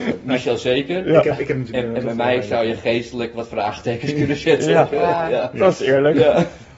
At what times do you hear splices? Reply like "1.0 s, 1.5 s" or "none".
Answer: 1.7 s